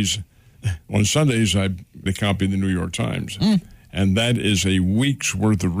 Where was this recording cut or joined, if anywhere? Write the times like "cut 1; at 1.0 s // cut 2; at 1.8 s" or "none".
cut 1; at 2.1 s